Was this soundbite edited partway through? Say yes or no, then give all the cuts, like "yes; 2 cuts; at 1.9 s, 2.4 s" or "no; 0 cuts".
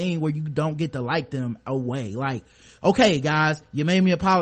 no; 0 cuts